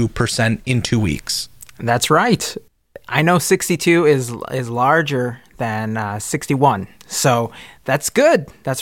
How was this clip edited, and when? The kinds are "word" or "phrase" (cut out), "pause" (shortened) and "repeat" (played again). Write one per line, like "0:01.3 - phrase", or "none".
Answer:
0:06.9 - pause